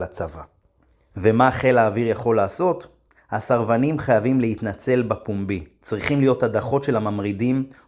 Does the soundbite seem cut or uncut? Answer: uncut